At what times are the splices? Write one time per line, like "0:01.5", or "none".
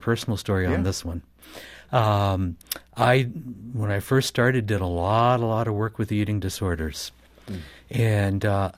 none